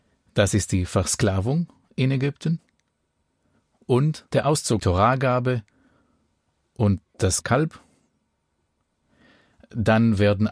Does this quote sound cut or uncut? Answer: cut